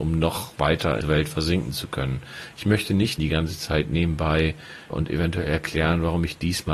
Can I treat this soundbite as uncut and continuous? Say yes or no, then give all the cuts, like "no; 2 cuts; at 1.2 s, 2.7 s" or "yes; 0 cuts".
no; 3 cuts; at 1.0 s, 3.2 s, 4.9 s